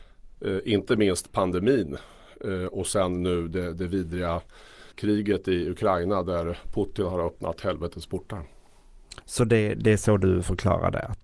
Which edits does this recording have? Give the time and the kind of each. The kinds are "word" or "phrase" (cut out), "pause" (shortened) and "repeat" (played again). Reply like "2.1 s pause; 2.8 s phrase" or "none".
4.9 s pause